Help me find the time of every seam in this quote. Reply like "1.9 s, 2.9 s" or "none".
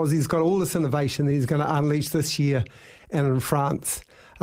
none